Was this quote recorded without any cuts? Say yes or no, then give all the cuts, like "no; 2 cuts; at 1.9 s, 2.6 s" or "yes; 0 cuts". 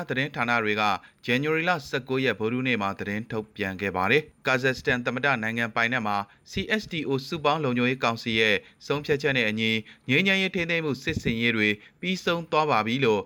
yes; 0 cuts